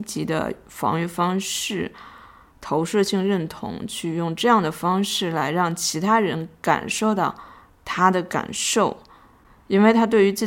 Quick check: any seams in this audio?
no; 0 cuts

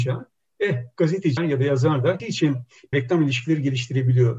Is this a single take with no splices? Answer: no; 3 cuts; at 1.4 s, 2.2 s, 2.9 s

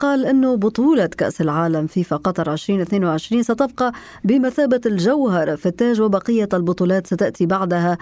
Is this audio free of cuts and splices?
yes; 0 cuts

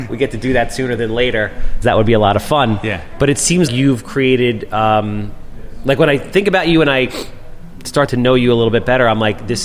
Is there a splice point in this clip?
yes; 3 cuts; at 1.8 s, 3.7 s, 8.1 s

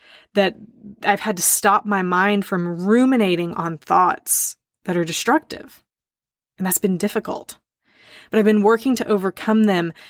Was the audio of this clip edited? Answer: no; 0 cuts

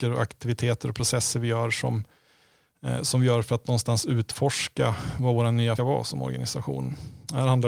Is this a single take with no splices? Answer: no; 1 cut; at 5.8 s

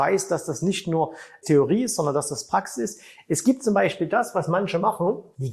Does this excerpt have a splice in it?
no; 0 cuts

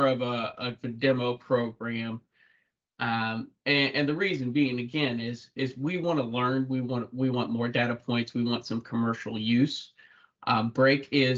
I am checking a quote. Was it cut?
no; 0 cuts

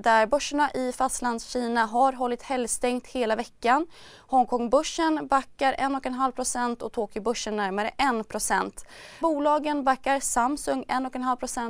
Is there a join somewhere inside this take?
yes; 1 cut; at 9.2 s

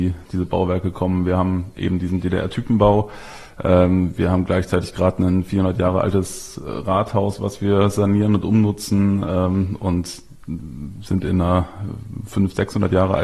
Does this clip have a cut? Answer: no; 0 cuts

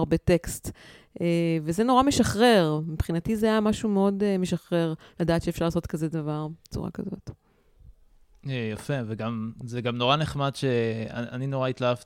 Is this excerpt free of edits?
yes; 0 cuts

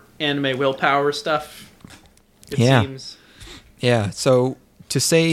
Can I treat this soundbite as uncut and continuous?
yes; 0 cuts

